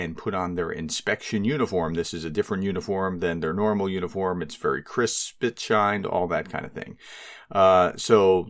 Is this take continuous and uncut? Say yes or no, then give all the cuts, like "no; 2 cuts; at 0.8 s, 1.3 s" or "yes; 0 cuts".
yes; 0 cuts